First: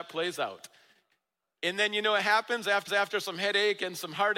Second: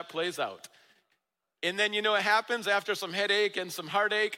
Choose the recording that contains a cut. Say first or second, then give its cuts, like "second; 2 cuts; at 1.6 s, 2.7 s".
first; 1 cut; at 2.9 s